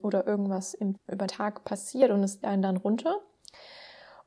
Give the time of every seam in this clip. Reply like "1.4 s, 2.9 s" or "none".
1.0 s, 1.3 s, 2.4 s